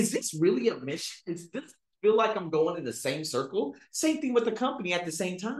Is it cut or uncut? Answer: uncut